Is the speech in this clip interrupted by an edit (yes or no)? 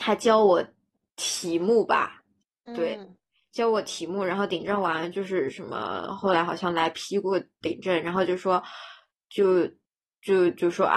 no